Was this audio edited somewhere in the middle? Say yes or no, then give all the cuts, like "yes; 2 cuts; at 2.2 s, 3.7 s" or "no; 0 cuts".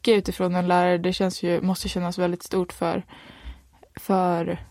no; 0 cuts